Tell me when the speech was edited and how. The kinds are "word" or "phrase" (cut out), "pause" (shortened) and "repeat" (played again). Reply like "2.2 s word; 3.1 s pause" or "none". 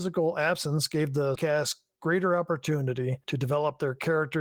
1.3 s word; 3.2 s pause